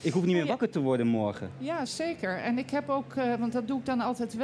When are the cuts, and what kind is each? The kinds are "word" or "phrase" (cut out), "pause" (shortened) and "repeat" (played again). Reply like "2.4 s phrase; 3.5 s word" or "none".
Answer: 1.9 s word

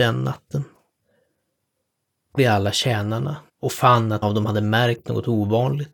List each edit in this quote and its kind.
2.4 s phrase; 3.5 s pause; 4.2 s word

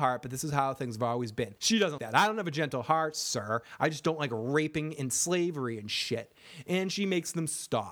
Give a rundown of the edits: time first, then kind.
1.6 s pause; 2.0 s word

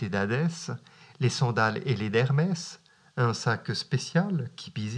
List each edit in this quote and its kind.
none

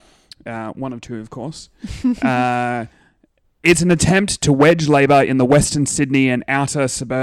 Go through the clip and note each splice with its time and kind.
none

